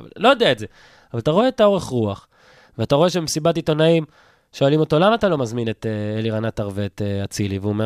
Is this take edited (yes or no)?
no